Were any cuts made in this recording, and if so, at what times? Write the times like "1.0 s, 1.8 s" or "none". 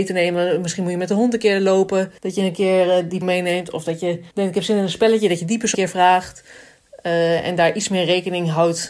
2.2 s, 3.2 s, 4.3 s, 5.7 s